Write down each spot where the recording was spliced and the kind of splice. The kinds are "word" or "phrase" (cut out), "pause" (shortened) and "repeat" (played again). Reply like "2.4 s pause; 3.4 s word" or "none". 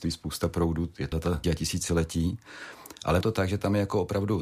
1.1 s word; 1.4 s word; 3.2 s word